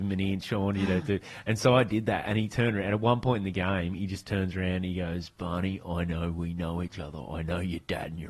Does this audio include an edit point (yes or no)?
no